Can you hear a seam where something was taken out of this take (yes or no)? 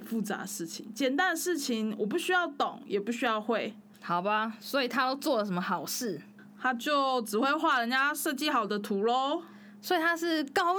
yes